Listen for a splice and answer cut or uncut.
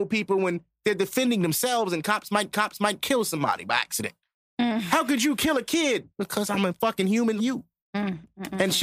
cut